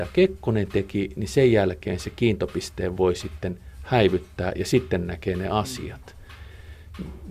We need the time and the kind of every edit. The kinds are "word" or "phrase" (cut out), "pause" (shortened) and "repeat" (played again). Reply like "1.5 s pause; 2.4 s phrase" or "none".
none